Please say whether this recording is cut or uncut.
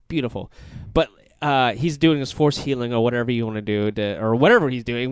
uncut